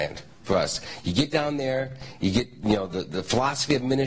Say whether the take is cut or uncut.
uncut